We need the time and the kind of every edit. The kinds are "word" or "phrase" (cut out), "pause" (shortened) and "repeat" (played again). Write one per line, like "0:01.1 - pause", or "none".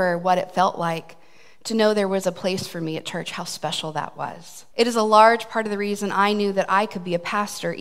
0:04.7 - pause